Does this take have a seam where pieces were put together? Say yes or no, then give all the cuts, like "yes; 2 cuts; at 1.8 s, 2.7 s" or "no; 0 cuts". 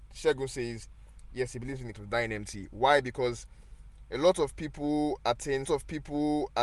yes; 2 cuts; at 1.9 s, 5.6 s